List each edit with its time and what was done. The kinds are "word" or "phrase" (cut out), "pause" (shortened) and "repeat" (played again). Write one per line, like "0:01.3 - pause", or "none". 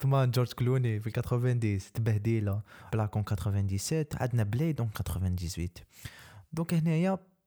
0:02.9 - phrase

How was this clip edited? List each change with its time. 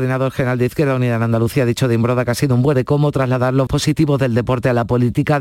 0:02.7 - word
0:03.7 - word

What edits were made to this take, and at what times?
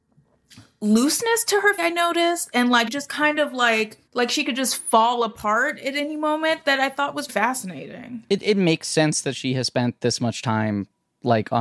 0:01.8 - word
0:02.9 - word
0:04.1 - pause
0:07.3 - word

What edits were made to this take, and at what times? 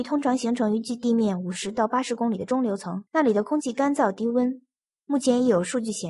0:03.1 - pause

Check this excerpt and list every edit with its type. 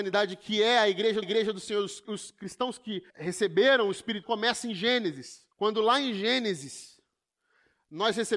0:01.2 - repeat
0:02.0 - word
0:03.1 - pause
0:04.2 - word
0:05.5 - pause

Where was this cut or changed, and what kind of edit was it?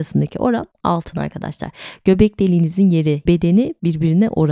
0:03.3 - word

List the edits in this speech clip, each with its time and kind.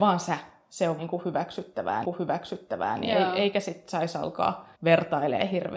0:01.0 - word
0:02.0 - repeat
0:04.7 - pause

